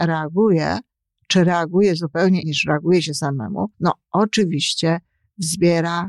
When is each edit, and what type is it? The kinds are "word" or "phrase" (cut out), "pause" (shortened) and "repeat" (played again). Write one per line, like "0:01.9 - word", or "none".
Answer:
0:02.4 - word
0:03.7 - pause